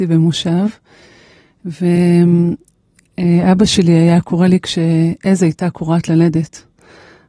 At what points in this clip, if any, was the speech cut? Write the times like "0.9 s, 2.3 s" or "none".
none